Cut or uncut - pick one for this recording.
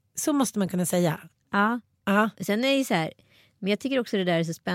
uncut